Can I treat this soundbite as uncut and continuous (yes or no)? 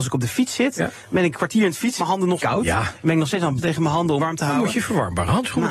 no